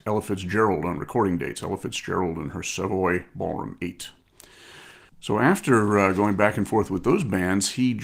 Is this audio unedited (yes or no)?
no